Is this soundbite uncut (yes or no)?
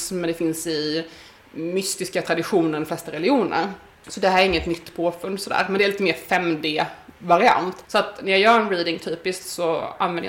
yes